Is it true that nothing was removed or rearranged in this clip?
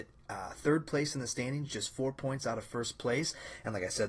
yes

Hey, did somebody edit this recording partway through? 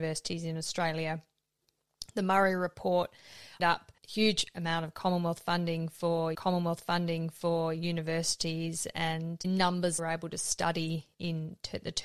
yes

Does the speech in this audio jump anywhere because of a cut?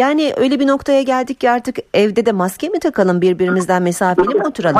no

